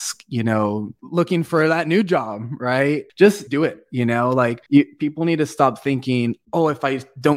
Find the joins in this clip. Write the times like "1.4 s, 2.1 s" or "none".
3.5 s, 4.7 s